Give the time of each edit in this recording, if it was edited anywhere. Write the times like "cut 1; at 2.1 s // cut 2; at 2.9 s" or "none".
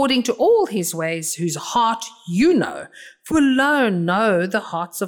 cut 1; at 3.3 s